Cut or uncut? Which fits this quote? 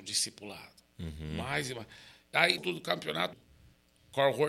cut